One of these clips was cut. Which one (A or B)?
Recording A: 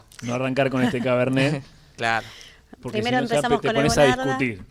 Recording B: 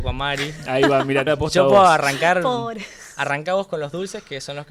B